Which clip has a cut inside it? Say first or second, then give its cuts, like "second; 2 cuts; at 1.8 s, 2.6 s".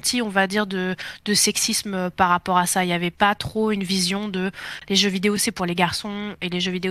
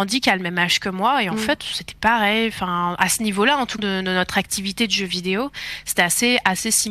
second; 1 cut; at 3.8 s